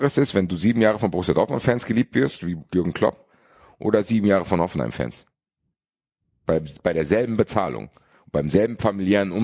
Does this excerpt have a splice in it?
no; 0 cuts

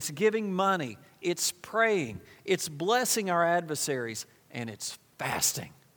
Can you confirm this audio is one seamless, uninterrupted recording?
yes; 0 cuts

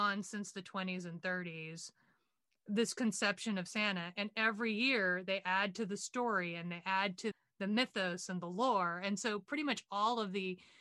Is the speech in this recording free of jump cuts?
yes; 0 cuts

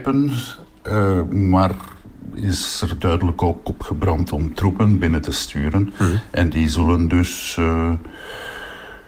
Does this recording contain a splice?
no; 0 cuts

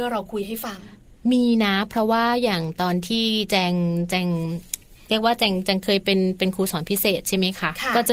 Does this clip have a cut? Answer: no; 0 cuts

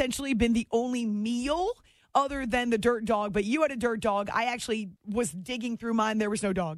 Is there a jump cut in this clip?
yes; 1 cut; at 5.0 s

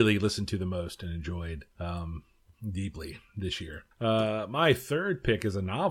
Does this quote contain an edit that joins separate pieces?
yes; 2 cuts; at 1.7 s, 3.9 s

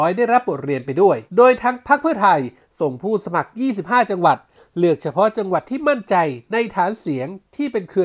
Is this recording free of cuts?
no; 1 cut; at 1.3 s

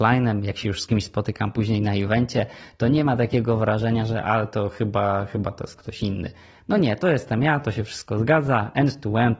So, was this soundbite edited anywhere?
no; 0 cuts

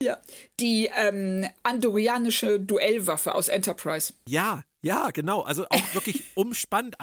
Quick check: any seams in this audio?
no; 0 cuts

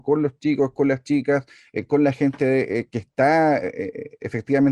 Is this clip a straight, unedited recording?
yes; 0 cuts

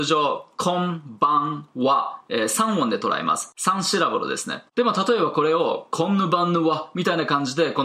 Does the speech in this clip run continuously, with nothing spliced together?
no; 1 cut; at 4.7 s

